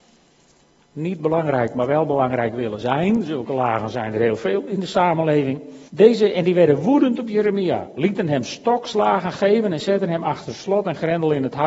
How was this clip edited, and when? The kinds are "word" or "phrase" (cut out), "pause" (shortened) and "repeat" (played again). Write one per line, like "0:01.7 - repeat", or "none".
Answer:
0:05.9 - pause